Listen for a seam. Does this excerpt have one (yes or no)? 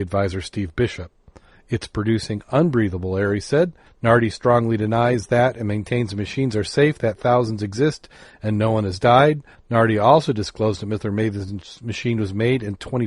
no